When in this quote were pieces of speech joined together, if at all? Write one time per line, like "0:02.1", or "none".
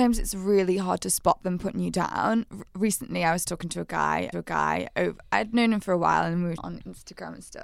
0:02.7
0:04.3
0:06.6